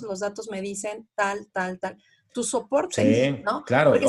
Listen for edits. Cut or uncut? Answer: uncut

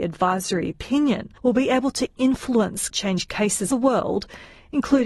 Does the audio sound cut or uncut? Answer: cut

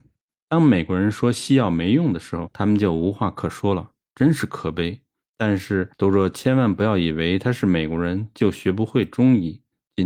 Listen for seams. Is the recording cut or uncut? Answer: uncut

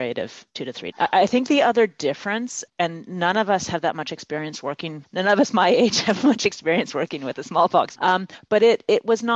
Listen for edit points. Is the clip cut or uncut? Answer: cut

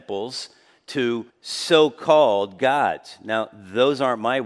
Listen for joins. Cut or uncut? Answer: cut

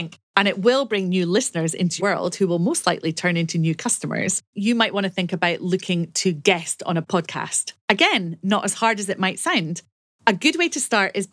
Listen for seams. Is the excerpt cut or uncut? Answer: cut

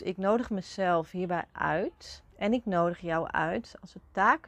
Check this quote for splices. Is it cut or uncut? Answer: cut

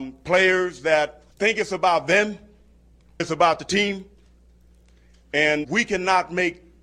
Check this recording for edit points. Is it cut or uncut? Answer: cut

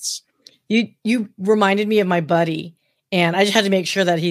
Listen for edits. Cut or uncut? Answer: uncut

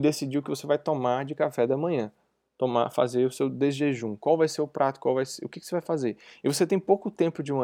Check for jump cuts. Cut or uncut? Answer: uncut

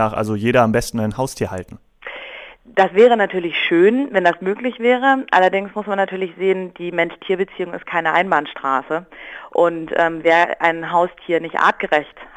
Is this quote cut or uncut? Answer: uncut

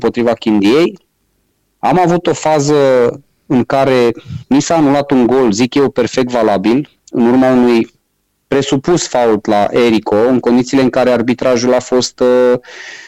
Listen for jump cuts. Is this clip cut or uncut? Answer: uncut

